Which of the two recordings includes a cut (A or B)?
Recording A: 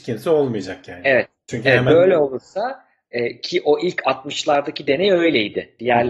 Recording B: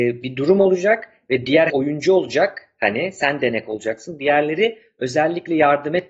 B